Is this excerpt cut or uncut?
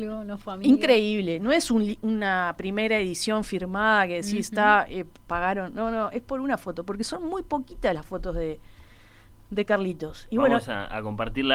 uncut